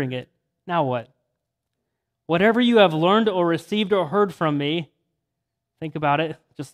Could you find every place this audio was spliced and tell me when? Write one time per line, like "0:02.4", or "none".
none